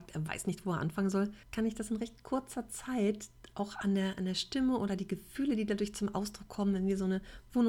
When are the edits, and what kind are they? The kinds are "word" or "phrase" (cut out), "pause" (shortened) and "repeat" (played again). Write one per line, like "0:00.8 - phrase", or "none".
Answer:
0:01.4 - pause